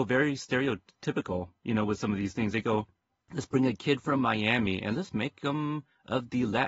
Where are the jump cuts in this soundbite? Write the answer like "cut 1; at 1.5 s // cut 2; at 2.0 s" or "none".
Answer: none